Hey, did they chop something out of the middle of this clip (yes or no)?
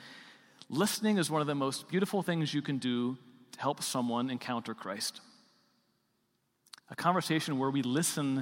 no